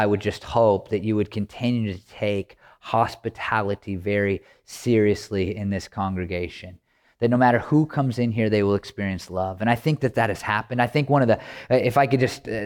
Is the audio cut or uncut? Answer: uncut